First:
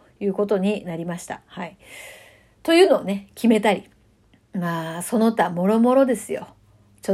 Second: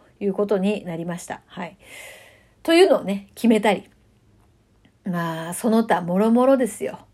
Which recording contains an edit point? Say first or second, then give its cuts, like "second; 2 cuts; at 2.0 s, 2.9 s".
first; 1 cut; at 4.1 s